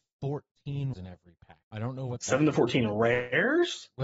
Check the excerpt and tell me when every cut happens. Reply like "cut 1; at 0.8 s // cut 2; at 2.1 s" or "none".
cut 1; at 0.9 s // cut 2; at 1.6 s